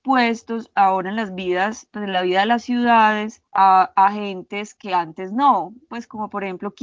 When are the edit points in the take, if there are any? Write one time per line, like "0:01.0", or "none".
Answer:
0:03.5